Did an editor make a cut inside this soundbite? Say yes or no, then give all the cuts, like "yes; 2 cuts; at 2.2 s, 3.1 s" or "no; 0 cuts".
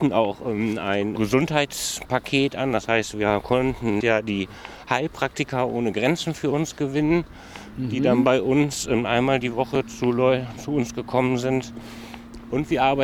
yes; 1 cut; at 4.0 s